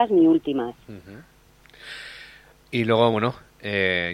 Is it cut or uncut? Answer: uncut